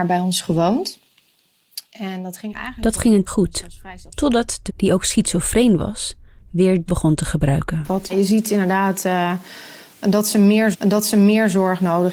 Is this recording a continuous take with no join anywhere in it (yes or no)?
no